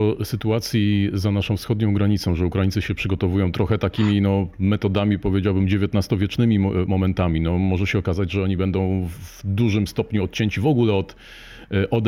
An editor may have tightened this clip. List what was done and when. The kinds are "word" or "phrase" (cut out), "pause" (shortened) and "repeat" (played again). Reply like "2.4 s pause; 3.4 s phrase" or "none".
none

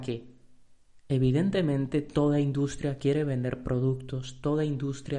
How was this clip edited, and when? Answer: none

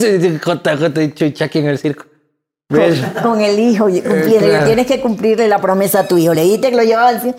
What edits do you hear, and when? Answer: none

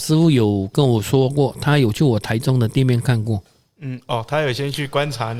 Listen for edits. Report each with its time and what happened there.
none

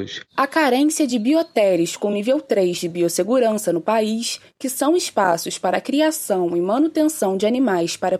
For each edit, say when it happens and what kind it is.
none

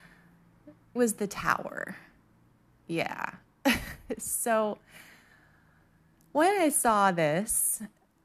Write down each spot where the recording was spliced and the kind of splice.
1.0 s word

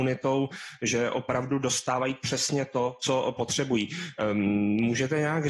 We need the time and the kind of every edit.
none

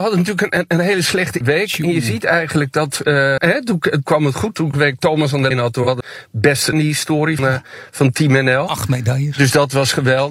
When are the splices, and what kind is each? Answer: 1.4 s word; 3.4 s word; 4.1 s word; 4.7 s word; 5.5 s word; 6.0 s word; 6.7 s phrase; 7.4 s word

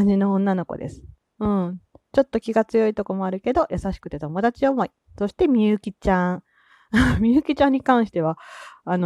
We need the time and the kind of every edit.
none

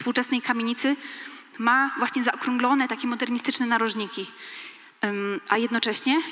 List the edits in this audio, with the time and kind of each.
none

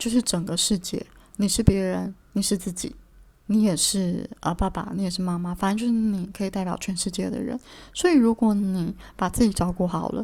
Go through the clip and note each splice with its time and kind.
2.2 s pause

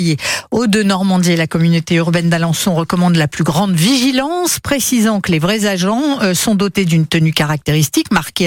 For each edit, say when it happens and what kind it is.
none

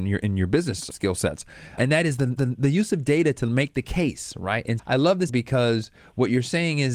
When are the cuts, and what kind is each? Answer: 0.9 s word; 1.8 s word; 2.4 s repeat; 4.8 s word; 5.3 s word

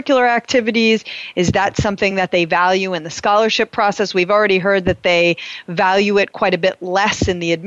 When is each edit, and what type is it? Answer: none

